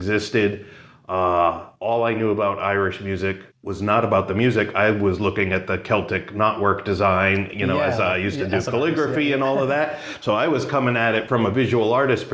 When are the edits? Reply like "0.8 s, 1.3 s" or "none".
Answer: 1.7 s, 3.5 s